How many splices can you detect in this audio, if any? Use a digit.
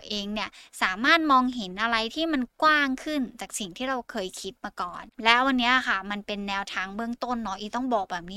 1